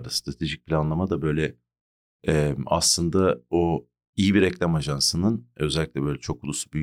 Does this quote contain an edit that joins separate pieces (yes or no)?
no